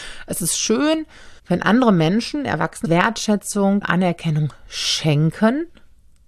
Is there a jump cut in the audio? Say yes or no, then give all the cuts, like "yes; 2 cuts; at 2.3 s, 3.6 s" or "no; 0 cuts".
yes; 3 cuts; at 1.4 s, 2.8 s, 3.8 s